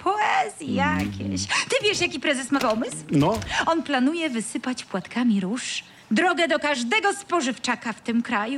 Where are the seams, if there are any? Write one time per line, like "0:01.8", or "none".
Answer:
0:06.0